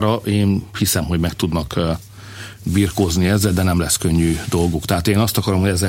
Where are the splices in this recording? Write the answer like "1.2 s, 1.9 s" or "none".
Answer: none